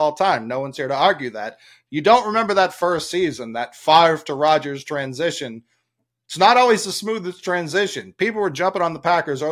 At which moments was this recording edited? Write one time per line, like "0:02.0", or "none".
none

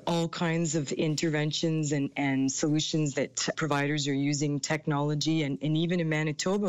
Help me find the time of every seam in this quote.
0:03.5

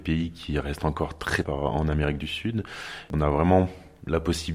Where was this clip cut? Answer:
0:01.4

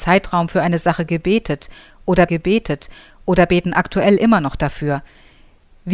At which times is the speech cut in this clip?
0:02.3

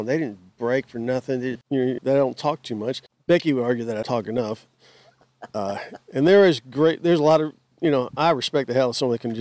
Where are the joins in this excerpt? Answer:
0:01.5
0:02.0
0:04.0

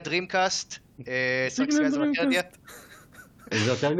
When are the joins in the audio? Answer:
none

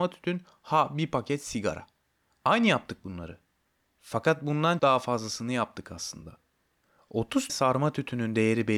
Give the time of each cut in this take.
0:04.8
0:07.5

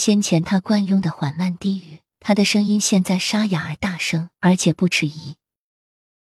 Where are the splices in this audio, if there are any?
0:02.1
0:04.4

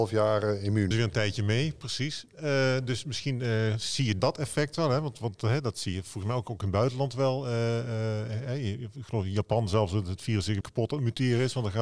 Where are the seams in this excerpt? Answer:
0:00.9
0:04.2
0:10.6

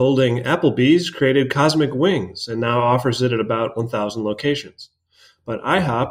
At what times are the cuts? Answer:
none

